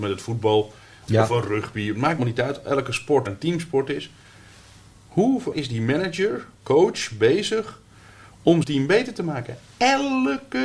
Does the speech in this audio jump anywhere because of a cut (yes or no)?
yes